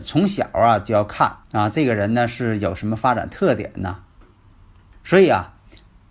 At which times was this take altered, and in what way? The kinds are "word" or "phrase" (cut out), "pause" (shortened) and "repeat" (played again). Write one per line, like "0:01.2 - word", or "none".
0:01.4 - pause